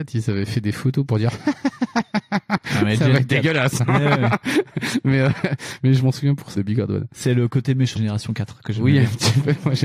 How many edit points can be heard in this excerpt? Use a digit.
2